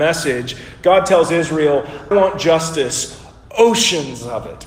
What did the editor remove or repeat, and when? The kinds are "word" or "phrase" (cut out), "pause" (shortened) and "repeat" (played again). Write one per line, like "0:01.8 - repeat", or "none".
0:02.1 - word